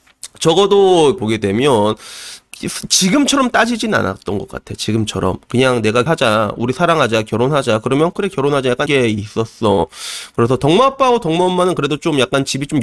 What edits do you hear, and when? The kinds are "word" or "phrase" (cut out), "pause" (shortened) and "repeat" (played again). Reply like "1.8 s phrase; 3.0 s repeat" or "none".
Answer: 1.2 s phrase; 6.1 s word; 8.1 s word; 8.9 s word